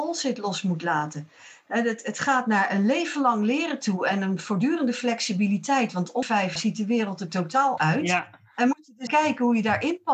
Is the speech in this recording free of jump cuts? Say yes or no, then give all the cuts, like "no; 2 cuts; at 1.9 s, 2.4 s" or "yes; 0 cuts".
no; 4 cuts; at 6.2 s, 6.6 s, 7.8 s, 9.1 s